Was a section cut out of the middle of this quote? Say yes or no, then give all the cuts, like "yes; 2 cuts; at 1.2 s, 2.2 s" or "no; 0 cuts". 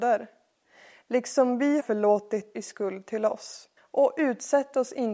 yes; 3 cuts; at 1.8 s, 2.5 s, 3.8 s